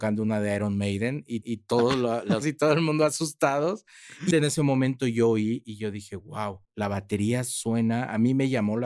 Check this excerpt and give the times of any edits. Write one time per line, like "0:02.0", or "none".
0:01.4
0:02.4
0:04.3
0:06.6